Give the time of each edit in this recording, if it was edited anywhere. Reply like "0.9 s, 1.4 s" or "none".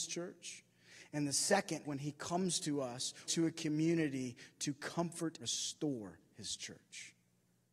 1.8 s, 3.3 s, 5.4 s